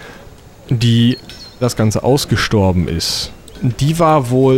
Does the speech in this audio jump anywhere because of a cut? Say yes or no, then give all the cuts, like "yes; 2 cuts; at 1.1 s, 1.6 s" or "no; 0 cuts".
yes; 1 cut; at 1.6 s